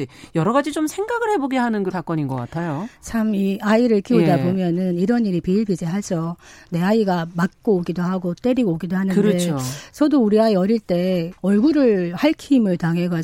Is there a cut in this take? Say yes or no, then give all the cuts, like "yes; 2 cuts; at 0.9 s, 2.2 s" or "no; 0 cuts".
yes; 2 cuts; at 1.9 s, 11.4 s